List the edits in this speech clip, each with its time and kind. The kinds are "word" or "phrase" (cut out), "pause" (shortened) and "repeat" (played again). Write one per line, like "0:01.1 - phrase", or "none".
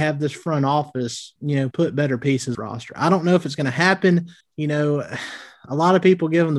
0:01.4 - pause
0:01.7 - word
0:02.5 - phrase
0:04.4 - pause

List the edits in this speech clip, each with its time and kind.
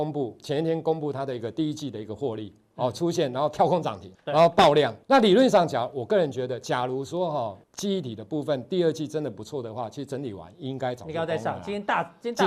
0:04.1 - pause
0:05.0 - pause
0:07.6 - pause

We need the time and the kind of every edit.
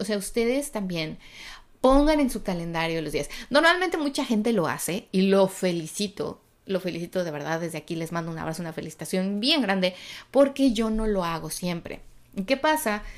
none

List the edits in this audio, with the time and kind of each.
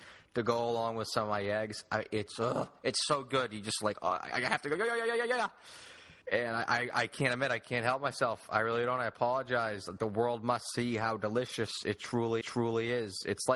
0:06.2 - pause
0:10.0 - word
0:12.4 - repeat

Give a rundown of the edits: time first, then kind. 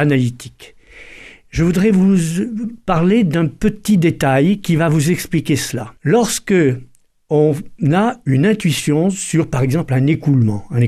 0:06.0 - pause

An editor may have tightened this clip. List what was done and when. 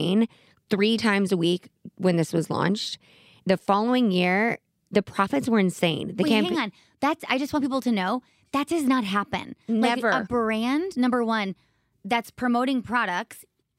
none

